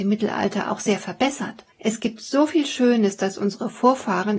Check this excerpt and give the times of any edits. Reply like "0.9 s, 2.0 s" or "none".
1.7 s